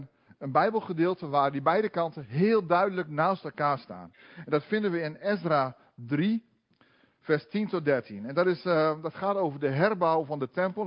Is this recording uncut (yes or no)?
yes